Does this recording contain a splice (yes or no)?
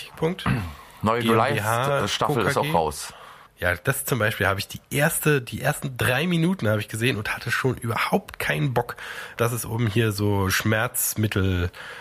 yes